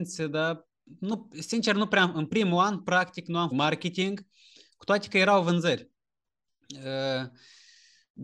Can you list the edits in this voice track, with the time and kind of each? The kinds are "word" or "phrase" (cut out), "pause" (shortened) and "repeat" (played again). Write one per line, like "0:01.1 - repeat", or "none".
0:03.5 - word